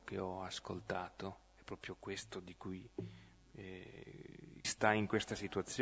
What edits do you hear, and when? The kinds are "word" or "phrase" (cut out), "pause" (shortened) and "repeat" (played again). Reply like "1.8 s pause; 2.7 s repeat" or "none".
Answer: 1.4 s pause; 4.6 s phrase